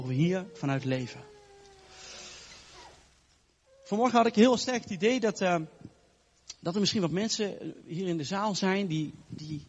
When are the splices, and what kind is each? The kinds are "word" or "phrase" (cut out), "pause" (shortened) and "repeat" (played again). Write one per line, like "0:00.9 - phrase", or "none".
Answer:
none